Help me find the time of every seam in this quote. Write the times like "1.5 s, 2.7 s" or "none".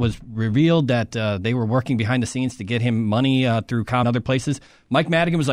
4.0 s